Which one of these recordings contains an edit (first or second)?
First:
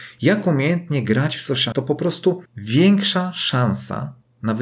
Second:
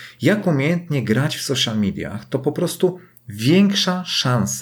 first